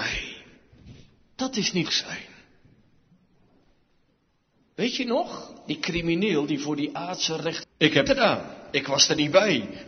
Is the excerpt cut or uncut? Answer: cut